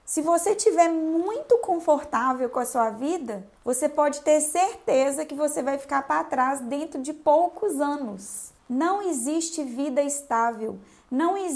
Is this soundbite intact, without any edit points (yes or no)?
no